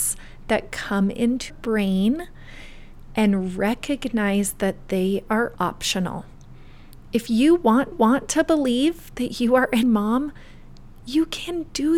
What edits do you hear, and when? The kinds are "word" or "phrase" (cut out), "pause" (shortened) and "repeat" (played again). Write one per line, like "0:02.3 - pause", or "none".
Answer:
0:01.5 - word
0:05.6 - word
0:07.9 - repeat
0:09.8 - word